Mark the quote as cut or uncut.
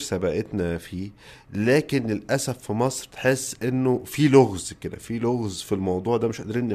uncut